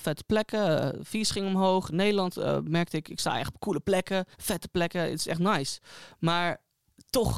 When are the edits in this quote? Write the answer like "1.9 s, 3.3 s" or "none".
4.3 s